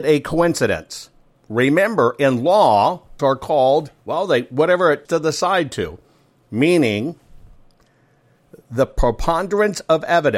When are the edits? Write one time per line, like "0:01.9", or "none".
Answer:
0:03.2
0:04.0
0:05.0